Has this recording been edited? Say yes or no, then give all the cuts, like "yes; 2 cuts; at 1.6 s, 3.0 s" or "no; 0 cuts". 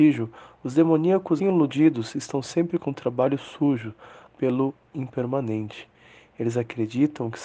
yes; 3 cuts; at 1.4 s, 2.8 s, 4.3 s